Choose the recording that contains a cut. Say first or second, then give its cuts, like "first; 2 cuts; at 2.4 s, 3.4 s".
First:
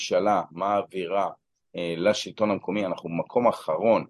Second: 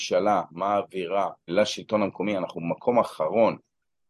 second; 1 cut; at 1.5 s